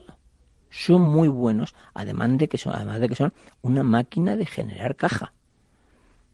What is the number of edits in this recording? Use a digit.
0